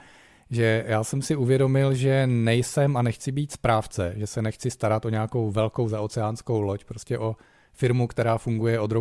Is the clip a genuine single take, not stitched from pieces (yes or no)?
yes